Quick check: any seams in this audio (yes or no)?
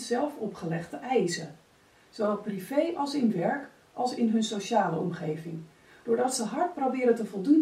no